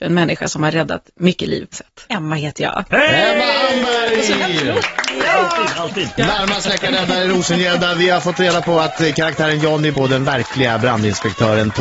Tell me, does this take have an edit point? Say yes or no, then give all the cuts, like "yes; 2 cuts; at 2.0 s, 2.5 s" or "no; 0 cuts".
yes; 2 cuts; at 1.7 s, 9.9 s